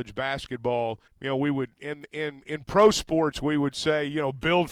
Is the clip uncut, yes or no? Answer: no